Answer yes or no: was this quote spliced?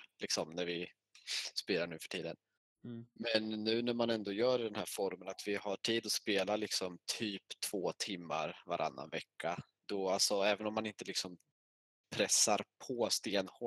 no